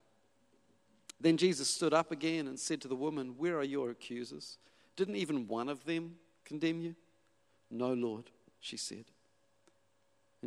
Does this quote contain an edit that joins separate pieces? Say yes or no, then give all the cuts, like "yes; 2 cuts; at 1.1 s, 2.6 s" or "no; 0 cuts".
no; 0 cuts